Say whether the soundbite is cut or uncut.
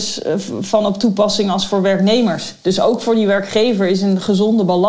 uncut